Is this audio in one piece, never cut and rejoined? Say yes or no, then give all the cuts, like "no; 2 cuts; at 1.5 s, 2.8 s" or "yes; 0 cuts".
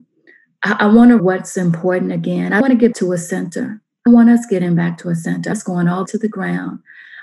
no; 6 cuts; at 1.2 s, 2.6 s, 2.9 s, 4.1 s, 5.5 s, 6.1 s